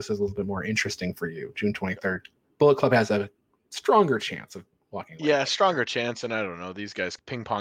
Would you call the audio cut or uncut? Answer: uncut